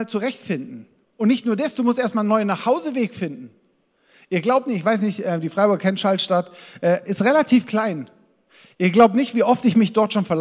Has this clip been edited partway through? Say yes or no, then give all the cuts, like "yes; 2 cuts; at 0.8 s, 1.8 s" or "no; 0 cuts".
no; 0 cuts